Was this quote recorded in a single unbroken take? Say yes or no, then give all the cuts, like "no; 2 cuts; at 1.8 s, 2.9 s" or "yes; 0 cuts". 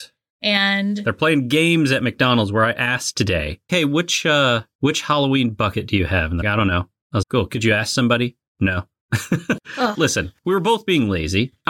no; 4 cuts; at 3.7 s, 6.4 s, 7.2 s, 9.9 s